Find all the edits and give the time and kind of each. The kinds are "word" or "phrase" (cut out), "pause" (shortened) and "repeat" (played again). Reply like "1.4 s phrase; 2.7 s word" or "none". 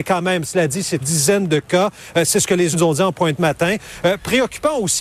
1.0 s word; 2.7 s word; 3.4 s word